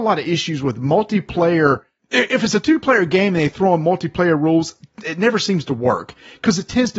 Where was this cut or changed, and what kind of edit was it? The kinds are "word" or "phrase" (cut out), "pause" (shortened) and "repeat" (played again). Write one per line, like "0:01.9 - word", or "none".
none